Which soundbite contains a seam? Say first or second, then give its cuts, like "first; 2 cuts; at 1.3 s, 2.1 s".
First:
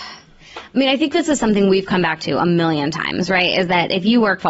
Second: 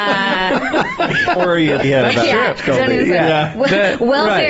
second; 2 cuts; at 1.4 s, 1.8 s